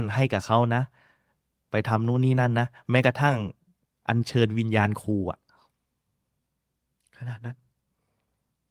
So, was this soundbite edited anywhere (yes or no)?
no